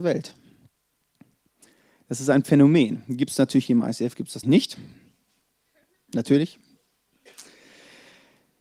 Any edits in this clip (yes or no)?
yes